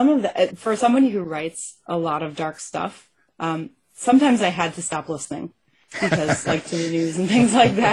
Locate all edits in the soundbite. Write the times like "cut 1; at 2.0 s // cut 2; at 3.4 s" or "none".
none